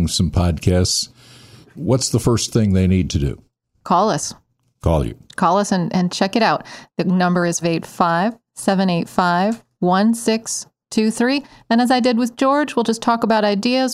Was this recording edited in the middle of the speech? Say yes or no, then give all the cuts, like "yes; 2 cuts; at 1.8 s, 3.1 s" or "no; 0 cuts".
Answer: yes; 1 cut; at 7.6 s